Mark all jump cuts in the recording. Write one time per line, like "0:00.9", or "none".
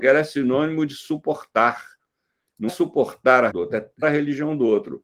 0:02.7
0:03.5
0:04.0